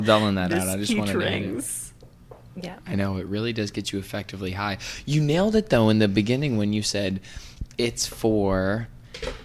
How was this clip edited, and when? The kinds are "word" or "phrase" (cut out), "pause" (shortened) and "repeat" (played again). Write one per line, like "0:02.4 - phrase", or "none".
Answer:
none